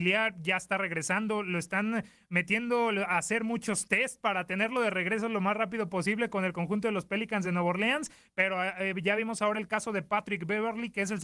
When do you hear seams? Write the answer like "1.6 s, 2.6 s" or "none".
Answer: none